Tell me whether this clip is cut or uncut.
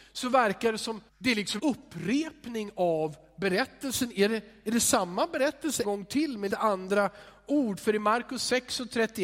cut